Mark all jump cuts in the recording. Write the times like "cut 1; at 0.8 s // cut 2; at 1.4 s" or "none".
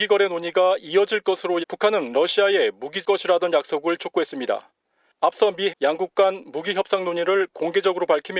cut 1; at 1.6 s // cut 2; at 3.0 s // cut 3; at 4.0 s // cut 4; at 5.7 s

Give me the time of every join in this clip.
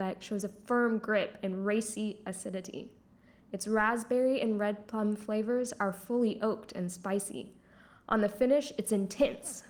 none

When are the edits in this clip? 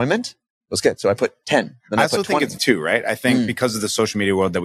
cut 1; at 2.6 s

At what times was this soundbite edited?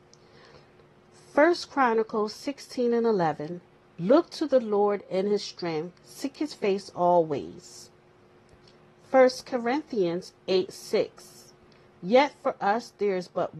none

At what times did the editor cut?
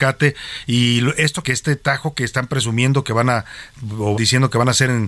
cut 1; at 1.4 s // cut 2; at 4.1 s

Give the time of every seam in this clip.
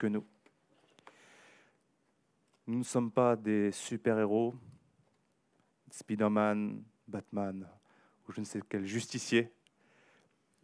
none

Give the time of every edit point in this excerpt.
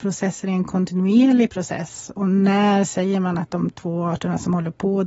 none

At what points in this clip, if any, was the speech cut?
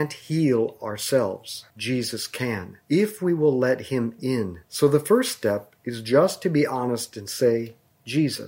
cut 1; at 1.7 s // cut 2; at 2.8 s // cut 3; at 4.7 s

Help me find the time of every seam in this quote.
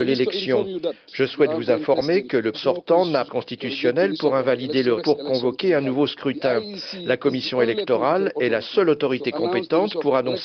cut 1; at 2.5 s // cut 2; at 3.3 s // cut 3; at 5.0 s

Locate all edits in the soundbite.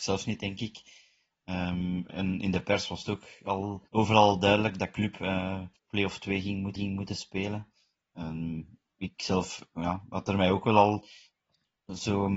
cut 1; at 3.9 s // cut 2; at 5.8 s // cut 3; at 6.8 s

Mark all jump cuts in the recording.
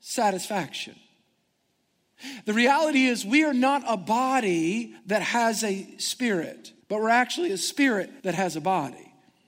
cut 1; at 5.0 s // cut 2; at 6.8 s // cut 3; at 8.2 s

